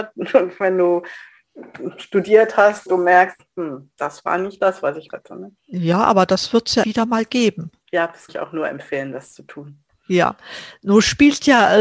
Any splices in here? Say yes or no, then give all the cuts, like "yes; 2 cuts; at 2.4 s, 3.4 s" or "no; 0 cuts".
yes; 6 cuts; at 2.9 s, 5.1 s, 5.6 s, 6.8 s, 7.8 s, 8.3 s